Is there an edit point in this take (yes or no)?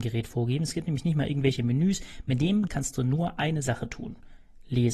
yes